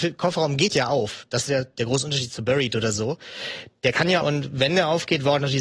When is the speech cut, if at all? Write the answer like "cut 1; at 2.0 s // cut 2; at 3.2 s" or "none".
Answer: cut 1; at 4.2 s